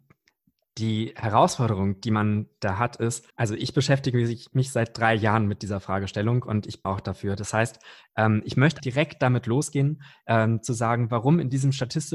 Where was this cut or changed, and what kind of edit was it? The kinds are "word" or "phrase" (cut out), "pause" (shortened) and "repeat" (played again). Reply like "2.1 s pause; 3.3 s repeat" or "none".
3.3 s pause; 6.8 s word; 8.8 s word